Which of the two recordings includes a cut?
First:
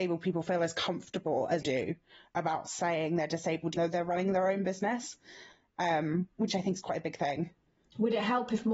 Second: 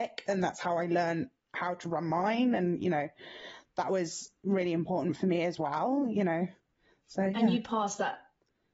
first; 3 cuts; at 1.6 s, 3.8 s, 6.3 s

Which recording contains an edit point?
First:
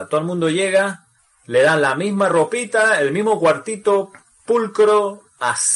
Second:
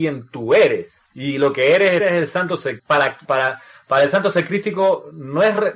second; 4 cuts; at 1.1 s, 2.0 s, 2.8 s, 3.2 s

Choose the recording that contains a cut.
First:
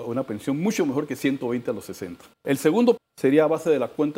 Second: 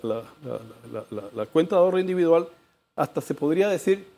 first; 2 cuts; at 2.3 s, 3.0 s

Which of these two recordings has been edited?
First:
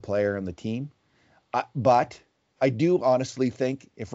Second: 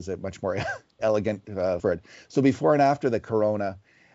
second; 1 cut; at 1.8 s

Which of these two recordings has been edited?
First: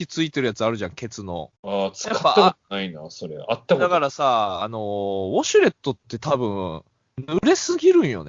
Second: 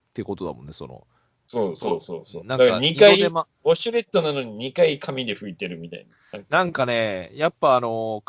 first; 1 cut; at 1.5 s

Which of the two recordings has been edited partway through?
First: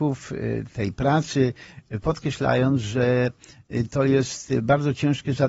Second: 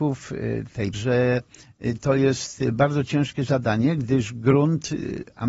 second; 1 cut; at 0.9 s

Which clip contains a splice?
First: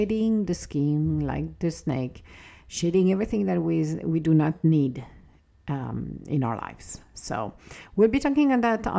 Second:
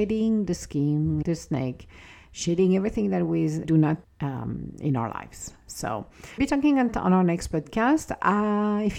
second; 5 cuts; at 1.2 s, 3.6 s, 4.0 s, 6.4 s, 6.9 s

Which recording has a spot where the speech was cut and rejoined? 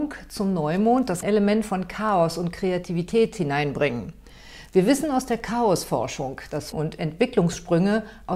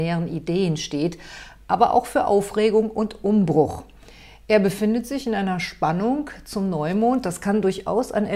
first; 2 cuts; at 1.2 s, 6.7 s

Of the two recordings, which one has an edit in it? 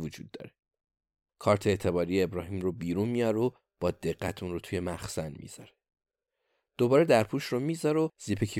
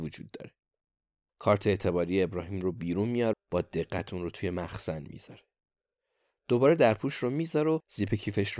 second; 1 cut; at 3.3 s

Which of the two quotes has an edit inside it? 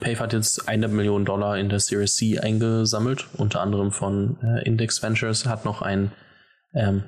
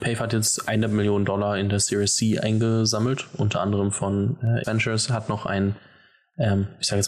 second; 1 cut; at 4.6 s

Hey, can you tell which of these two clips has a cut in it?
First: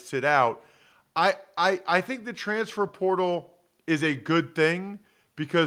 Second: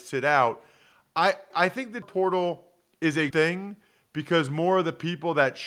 second; 3 cuts; at 1.5 s, 2.0 s, 3.3 s

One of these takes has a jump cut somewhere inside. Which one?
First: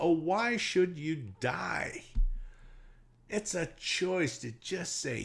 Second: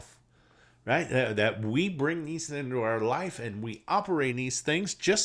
second; 2 cuts; at 2.5 s, 4.3 s

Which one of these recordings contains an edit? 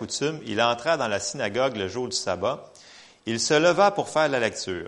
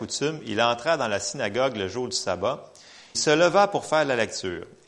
second; 1 cut; at 3.1 s

